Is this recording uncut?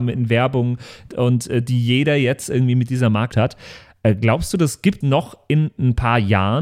no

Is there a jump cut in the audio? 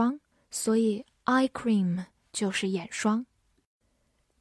no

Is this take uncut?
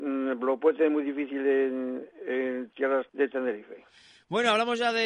no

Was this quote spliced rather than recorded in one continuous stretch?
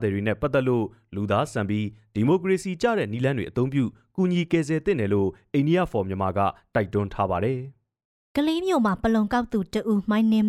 no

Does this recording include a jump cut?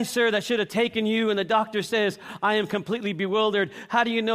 no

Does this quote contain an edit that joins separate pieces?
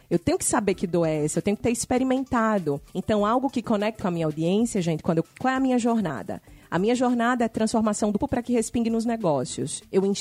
yes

